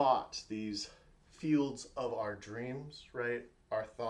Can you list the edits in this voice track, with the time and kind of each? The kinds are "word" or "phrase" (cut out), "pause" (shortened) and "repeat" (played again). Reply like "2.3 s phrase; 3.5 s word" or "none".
none